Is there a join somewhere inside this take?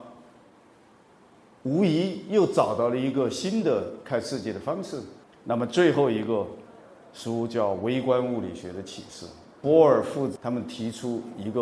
no; 0 cuts

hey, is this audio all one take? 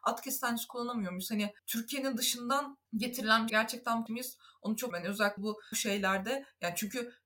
no; 7 cuts; at 1.6 s, 2.9 s, 3.5 s, 4.1 s, 4.9 s, 5.4 s, 5.7 s

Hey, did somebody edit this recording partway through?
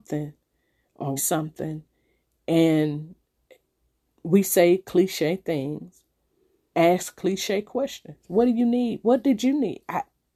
yes; 2 cuts; at 1.2 s, 6.7 s

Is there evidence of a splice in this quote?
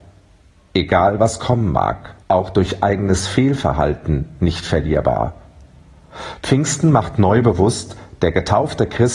yes; 1 cut; at 2.2 s

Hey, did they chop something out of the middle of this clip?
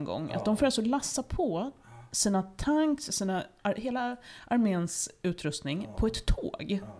no; 0 cuts

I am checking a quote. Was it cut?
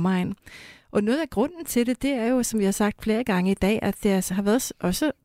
no; 0 cuts

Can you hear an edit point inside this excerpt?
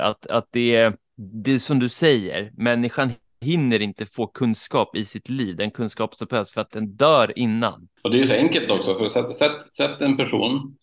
no; 0 cuts

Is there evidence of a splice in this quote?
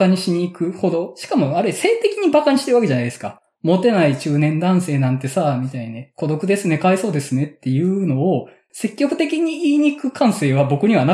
no; 0 cuts

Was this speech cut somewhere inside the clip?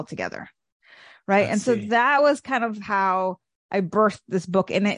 no; 0 cuts

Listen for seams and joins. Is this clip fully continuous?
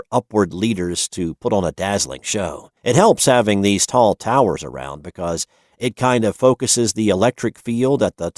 no; 1 cut; at 2.8 s

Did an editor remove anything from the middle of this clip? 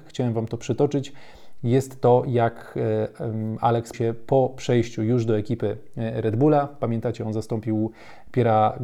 yes; 1 cut; at 3.9 s

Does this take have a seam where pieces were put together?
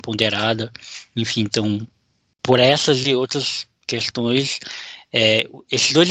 no; 0 cuts

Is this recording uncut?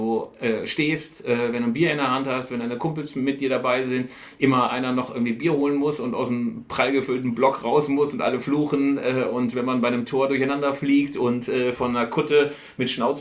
yes; 0 cuts

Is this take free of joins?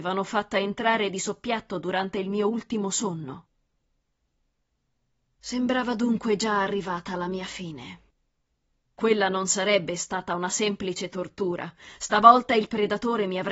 yes; 0 cuts

